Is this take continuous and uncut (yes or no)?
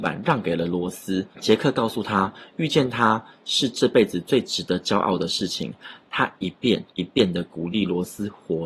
no